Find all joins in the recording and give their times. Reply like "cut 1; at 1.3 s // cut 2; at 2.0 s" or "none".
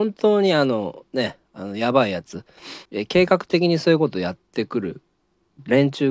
cut 1; at 1.5 s // cut 2; at 2.9 s